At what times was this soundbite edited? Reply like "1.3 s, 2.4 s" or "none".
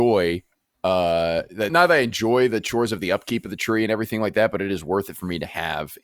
1.7 s